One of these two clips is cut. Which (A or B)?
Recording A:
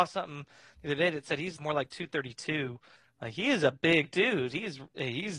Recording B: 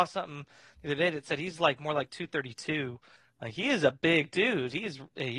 A